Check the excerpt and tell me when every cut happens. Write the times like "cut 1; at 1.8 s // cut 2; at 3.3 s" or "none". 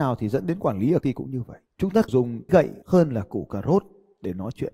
cut 1; at 1.0 s // cut 2; at 1.7 s // cut 3; at 2.1 s // cut 4; at 2.5 s // cut 5; at 2.8 s